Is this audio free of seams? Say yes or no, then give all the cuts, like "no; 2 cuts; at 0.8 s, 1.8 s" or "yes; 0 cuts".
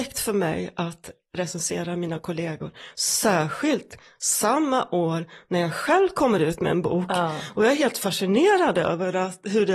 yes; 0 cuts